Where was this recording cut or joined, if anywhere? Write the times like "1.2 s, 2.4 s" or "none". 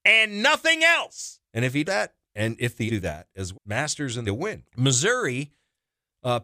1.4 s, 1.9 s, 2.2 s, 2.9 s, 3.5 s, 4.2 s, 4.7 s